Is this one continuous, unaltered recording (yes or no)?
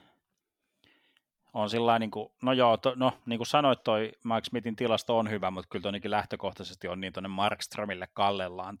yes